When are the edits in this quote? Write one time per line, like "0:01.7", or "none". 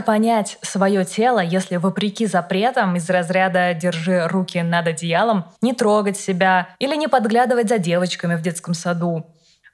0:05.6
0:06.7